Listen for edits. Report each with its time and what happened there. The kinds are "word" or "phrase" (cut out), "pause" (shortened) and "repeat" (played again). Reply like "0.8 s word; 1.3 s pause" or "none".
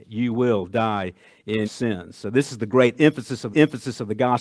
1.6 s word; 3.5 s repeat